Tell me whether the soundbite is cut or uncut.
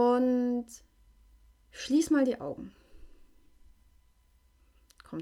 uncut